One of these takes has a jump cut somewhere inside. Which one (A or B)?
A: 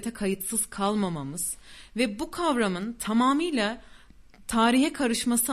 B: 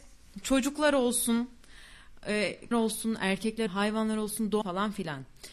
B